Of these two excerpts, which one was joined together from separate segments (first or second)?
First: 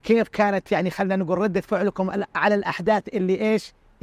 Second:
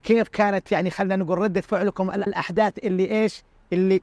second